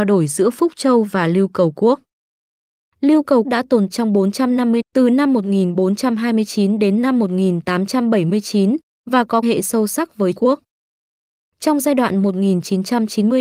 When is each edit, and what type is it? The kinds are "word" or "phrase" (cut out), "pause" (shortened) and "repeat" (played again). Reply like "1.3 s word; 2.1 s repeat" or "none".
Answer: 3.4 s word; 3.9 s word; 4.8 s word; 9.4 s word; 10.3 s word

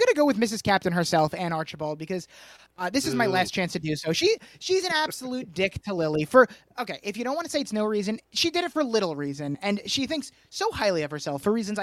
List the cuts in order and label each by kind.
none

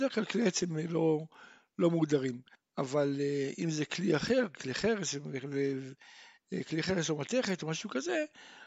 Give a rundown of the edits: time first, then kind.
2.5 s pause

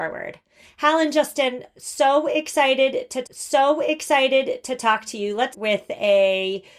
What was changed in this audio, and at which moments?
3.2 s repeat; 5.5 s word

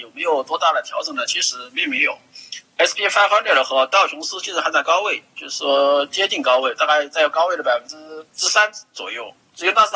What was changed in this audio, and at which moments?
8.3 s pause

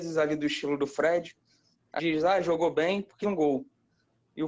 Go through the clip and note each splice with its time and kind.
2.0 s word; 3.2 s word

